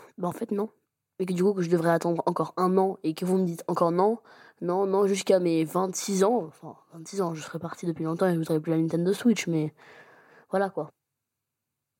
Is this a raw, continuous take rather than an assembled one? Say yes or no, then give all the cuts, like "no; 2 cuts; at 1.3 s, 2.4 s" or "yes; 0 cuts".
yes; 0 cuts